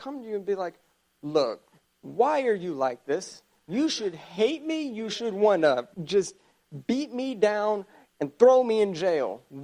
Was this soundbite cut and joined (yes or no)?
yes